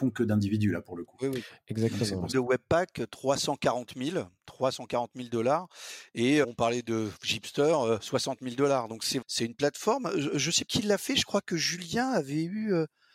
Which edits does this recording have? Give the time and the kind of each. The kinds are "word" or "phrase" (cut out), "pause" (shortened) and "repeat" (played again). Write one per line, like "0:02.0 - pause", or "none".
0:02.3 - phrase
0:06.4 - word
0:09.2 - word
0:10.7 - word